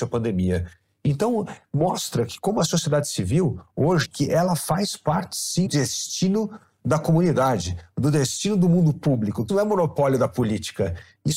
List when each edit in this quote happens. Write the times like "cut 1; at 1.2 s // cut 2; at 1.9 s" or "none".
cut 1; at 4.0 s // cut 2; at 5.7 s // cut 3; at 9.5 s